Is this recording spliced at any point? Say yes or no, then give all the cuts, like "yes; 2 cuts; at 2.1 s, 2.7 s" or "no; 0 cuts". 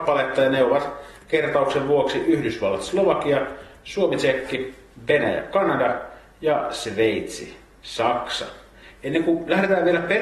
no; 0 cuts